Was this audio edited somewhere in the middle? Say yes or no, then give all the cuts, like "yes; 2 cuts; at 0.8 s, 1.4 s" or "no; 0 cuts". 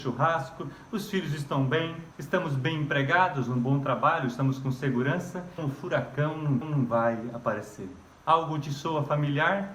yes; 4 cuts; at 2.1 s, 5.6 s, 6.6 s, 8.1 s